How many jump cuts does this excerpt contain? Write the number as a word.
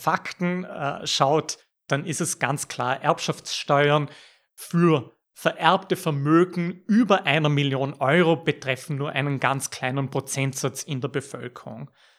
zero